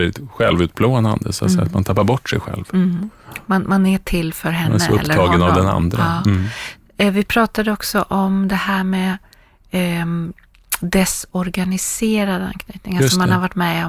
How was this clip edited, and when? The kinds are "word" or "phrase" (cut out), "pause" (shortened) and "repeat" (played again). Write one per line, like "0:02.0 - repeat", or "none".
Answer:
none